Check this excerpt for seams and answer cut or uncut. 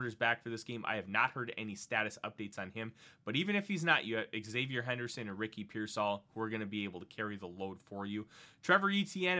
uncut